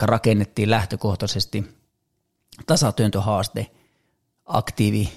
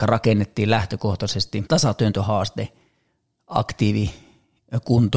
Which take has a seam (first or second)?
second